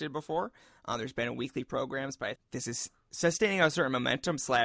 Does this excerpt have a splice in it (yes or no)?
yes